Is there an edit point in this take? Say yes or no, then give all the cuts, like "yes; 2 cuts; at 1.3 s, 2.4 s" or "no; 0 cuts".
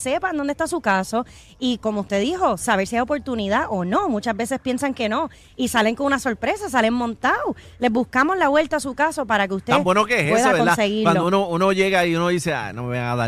no; 0 cuts